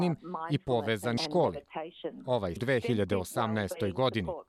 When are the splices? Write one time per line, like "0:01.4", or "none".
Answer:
0:01.2
0:02.6